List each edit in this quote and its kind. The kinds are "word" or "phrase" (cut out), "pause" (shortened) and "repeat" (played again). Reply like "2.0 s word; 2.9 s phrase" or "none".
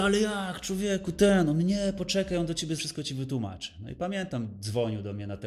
2.8 s word